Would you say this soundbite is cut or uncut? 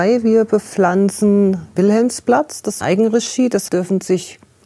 cut